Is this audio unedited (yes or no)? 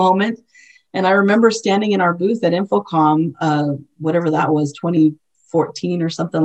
yes